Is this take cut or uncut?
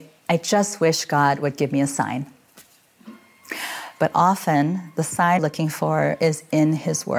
cut